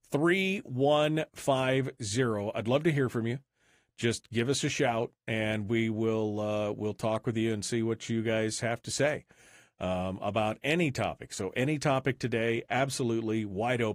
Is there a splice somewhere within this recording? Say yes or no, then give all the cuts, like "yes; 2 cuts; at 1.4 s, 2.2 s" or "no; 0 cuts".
no; 0 cuts